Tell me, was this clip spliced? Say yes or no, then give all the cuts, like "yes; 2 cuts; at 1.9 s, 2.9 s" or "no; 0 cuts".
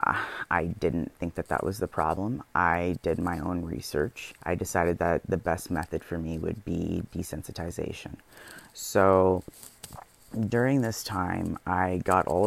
yes; 1 cut; at 4.4 s